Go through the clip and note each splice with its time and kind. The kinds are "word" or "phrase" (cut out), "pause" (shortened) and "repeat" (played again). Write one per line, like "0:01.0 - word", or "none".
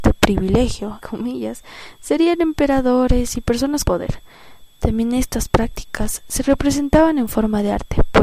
0:01.0 - word
0:03.8 - word